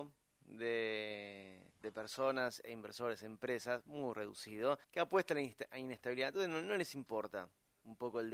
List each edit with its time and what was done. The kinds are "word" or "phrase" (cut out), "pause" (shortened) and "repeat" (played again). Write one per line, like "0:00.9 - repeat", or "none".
0:01.7 - pause
0:04.8 - pause